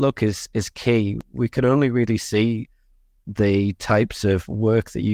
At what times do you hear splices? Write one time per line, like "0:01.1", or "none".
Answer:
none